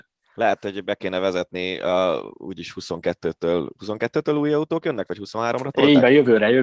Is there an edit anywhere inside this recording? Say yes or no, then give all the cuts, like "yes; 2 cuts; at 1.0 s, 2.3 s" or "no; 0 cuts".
no; 0 cuts